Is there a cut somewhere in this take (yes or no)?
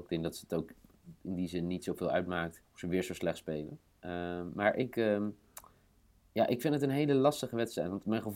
yes